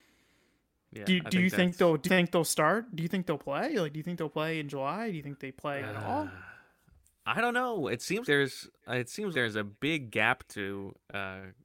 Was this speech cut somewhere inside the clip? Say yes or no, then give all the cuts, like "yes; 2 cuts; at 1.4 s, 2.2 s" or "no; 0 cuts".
yes; 4 cuts; at 2.1 s, 5.8 s, 8.2 s, 9.3 s